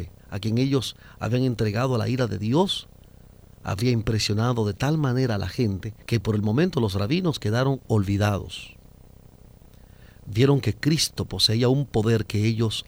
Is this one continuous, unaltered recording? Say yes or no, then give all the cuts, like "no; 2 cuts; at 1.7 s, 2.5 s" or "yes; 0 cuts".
no; 1 cut; at 6.0 s